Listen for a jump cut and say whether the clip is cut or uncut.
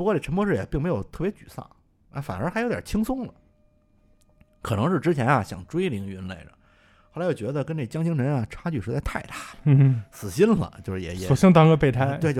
uncut